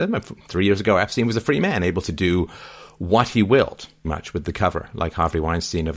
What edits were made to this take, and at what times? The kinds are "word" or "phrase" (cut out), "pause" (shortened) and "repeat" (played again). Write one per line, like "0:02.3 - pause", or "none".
0:04.0 - word